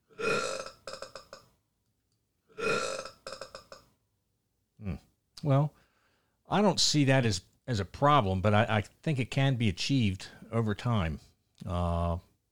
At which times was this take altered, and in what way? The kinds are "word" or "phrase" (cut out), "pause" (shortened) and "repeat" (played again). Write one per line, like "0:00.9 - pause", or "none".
none